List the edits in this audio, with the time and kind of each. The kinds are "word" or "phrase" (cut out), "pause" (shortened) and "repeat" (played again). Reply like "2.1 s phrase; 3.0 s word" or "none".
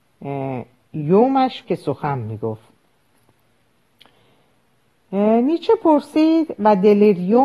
1.6 s word